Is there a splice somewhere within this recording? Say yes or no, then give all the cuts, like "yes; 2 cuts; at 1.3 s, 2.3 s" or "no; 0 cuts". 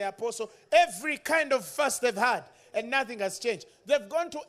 no; 0 cuts